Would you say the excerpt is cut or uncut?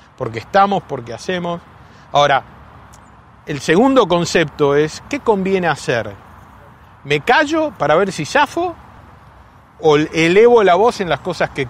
uncut